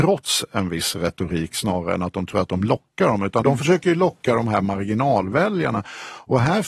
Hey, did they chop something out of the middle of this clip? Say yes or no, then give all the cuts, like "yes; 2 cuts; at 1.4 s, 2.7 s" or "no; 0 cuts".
yes; 1 cut; at 3.4 s